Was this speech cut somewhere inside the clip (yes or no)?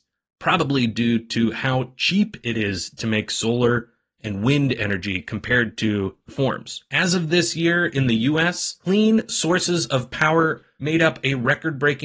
yes